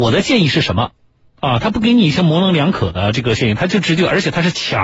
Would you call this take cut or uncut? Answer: uncut